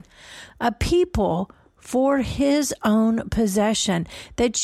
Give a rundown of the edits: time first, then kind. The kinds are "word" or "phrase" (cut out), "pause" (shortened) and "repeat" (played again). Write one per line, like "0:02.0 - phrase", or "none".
none

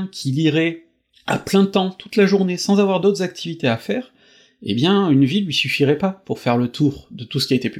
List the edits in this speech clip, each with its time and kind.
none

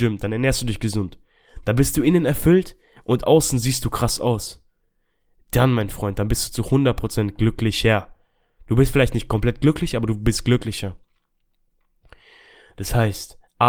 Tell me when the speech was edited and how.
none

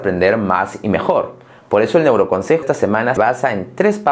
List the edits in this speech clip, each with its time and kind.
0:02.6 - word
0:03.2 - word

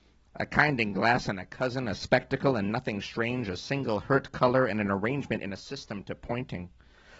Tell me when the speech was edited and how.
none

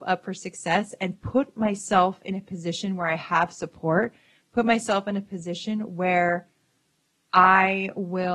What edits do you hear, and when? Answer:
none

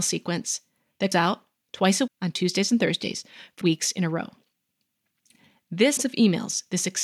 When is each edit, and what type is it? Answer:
0:01.1 - word
0:02.1 - word
0:03.6 - word
0:06.0 - word

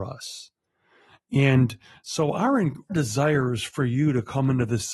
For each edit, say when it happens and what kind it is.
0:02.9 - word

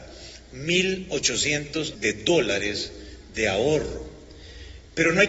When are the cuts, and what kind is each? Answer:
0:01.9 - word

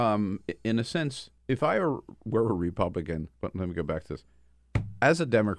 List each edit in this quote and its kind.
0:01.4 - pause
0:03.3 - pause

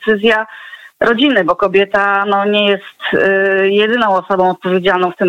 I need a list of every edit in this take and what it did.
none

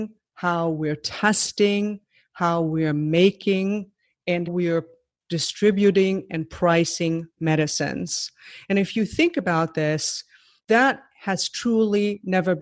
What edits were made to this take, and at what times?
0:04.5 - word
0:10.6 - word

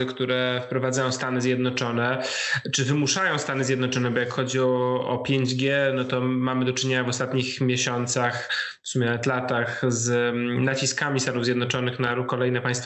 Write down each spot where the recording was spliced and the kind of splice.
none

